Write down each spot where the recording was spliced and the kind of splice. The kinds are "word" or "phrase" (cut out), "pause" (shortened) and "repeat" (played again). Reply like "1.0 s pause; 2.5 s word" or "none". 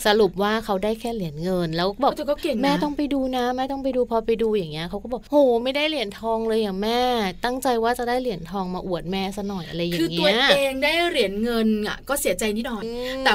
none